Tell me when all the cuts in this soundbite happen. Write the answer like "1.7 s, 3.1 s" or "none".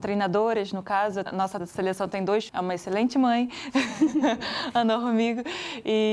1.3 s, 1.6 s, 2.5 s